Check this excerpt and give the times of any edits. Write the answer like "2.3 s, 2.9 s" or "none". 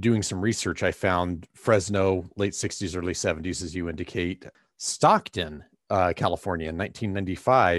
none